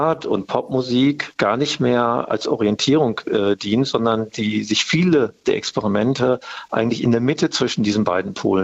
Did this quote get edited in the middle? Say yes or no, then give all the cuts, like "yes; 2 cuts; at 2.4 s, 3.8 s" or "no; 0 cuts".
no; 0 cuts